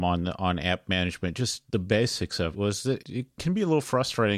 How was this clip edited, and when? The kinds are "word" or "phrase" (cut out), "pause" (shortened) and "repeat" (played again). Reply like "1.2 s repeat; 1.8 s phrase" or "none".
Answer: 1.7 s pause; 2.5 s word; 3.0 s word